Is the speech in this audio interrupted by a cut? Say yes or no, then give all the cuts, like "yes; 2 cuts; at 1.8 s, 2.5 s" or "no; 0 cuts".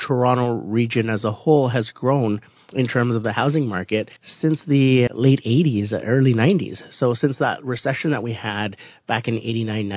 yes; 2 cuts; at 4.2 s, 5.1 s